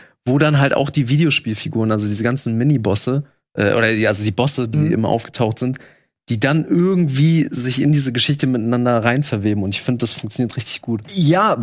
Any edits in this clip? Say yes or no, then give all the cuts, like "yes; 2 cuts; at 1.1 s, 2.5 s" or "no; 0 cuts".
no; 0 cuts